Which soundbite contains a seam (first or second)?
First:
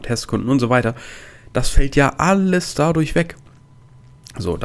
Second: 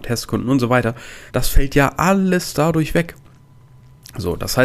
second